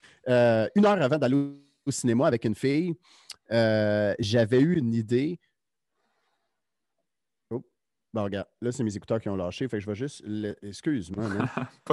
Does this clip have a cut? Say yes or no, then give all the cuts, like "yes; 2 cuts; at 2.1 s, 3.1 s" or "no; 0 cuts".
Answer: no; 0 cuts